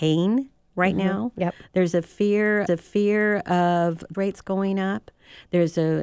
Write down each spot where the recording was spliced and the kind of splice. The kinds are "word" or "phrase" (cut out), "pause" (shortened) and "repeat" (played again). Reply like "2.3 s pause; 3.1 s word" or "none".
2.7 s repeat; 4.1 s word